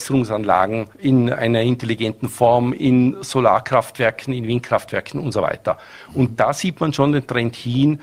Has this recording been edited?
yes; 1 cut; at 0.9 s

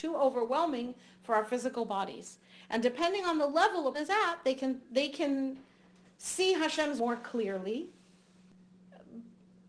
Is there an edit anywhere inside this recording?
yes; 2 cuts; at 3.9 s, 7.0 s

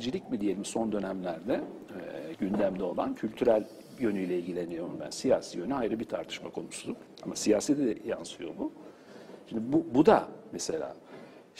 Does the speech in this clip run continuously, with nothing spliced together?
yes; 0 cuts

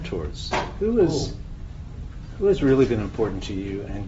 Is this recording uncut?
yes; 0 cuts

